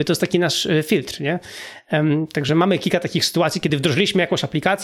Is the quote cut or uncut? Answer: uncut